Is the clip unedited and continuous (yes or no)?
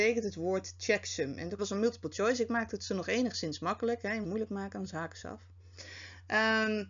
no